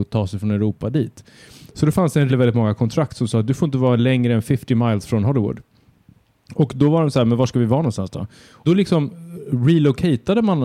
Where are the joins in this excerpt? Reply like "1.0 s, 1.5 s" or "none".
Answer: 2.3 s, 8.7 s

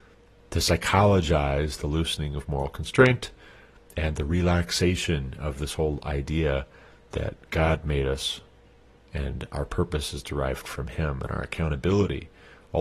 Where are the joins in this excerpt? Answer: none

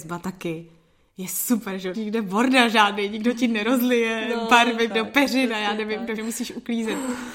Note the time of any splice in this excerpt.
1.9 s, 4.9 s, 6.2 s

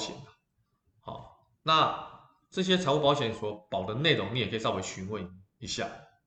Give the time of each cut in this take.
none

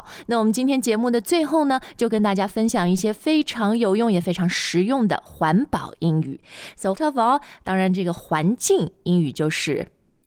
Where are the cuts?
7.0 s

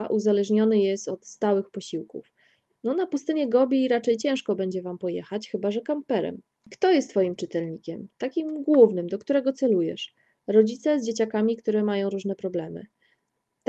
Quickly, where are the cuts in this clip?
none

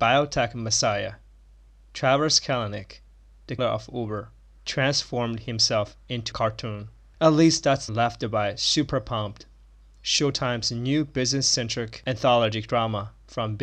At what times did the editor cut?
3.6 s, 6.3 s, 7.9 s

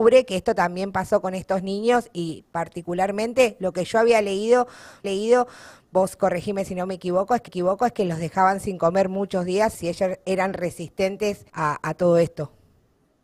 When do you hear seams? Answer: 5.0 s, 7.5 s, 9.7 s, 11.5 s

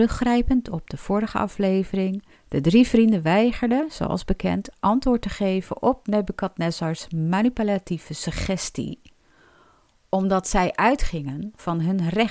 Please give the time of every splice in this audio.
2.3 s

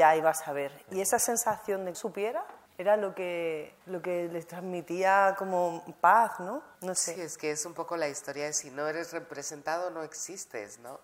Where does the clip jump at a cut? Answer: 1.9 s, 2.7 s, 3.8 s, 6.7 s

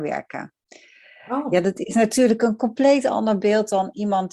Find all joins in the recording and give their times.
none

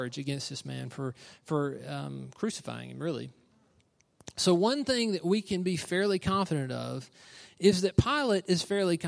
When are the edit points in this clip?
none

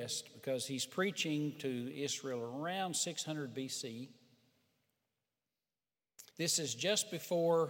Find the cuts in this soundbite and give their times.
6.3 s

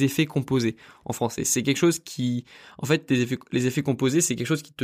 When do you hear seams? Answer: none

